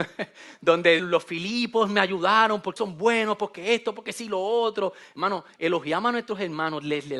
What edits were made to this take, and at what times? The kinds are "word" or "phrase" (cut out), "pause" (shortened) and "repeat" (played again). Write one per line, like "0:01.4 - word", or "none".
0:01.0 - word
0:02.8 - word